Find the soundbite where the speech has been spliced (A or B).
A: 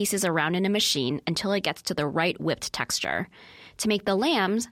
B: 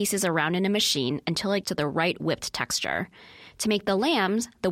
B